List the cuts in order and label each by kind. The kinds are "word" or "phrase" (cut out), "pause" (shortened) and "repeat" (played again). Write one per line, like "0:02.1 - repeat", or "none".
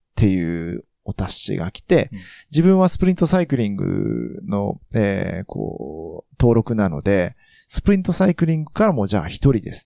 none